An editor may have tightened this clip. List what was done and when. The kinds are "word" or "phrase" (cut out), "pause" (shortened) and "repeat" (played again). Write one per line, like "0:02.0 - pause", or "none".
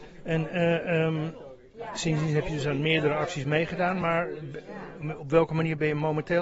none